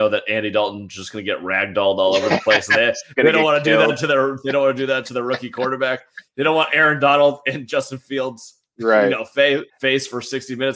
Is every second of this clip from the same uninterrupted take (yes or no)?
no